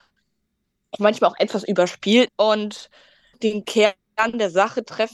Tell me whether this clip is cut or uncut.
cut